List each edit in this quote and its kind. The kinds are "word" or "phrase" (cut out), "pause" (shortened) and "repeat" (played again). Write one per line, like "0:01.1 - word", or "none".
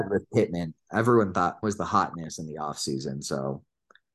0:01.6 - word